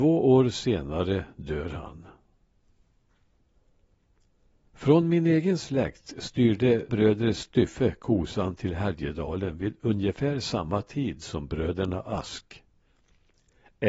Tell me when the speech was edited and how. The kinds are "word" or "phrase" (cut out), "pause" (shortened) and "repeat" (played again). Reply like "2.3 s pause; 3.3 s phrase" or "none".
6.9 s word